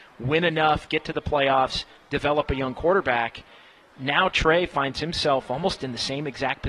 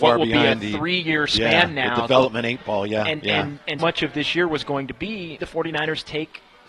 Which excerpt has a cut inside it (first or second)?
second